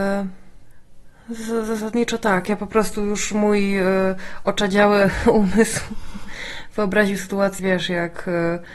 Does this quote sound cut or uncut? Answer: cut